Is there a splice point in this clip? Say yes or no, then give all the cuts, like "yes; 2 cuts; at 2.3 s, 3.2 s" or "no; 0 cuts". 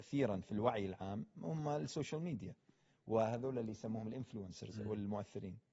no; 0 cuts